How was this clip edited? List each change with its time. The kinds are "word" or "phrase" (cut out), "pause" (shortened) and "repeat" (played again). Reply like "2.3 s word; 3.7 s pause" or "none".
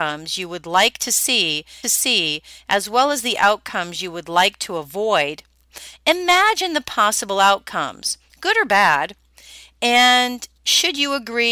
1.8 s repeat

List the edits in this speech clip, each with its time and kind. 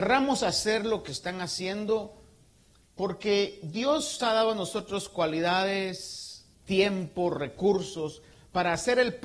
1.1 s word; 4.2 s word; 6.5 s pause

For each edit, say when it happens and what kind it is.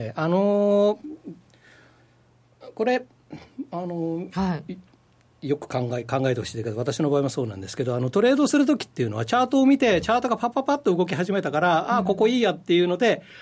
4.3 s phrase

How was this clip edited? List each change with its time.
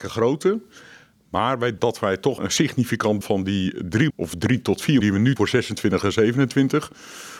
1.8 s word; 2.4 s word; 3.2 s word; 4.1 s word; 5.0 s word; 5.4 s word

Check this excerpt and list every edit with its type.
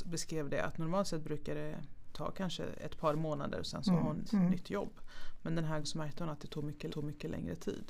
4.3 s word; 5.8 s word; 6.9 s repeat

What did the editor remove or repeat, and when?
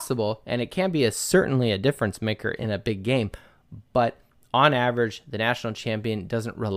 none

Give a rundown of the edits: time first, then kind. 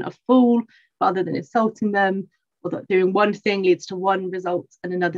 none

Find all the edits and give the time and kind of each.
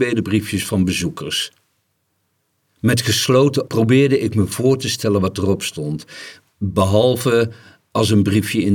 3.7 s word

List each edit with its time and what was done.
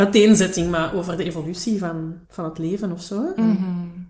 2.2 s pause

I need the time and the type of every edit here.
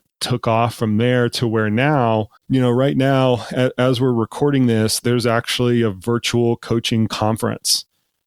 2.4 s pause

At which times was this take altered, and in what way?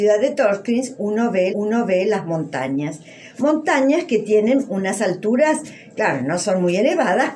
1.5 s repeat

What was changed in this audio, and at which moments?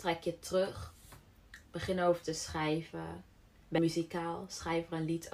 3.8 s word

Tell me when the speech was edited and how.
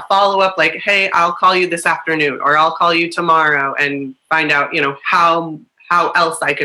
none

